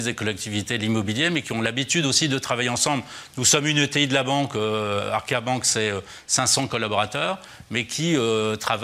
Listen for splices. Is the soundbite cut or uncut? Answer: uncut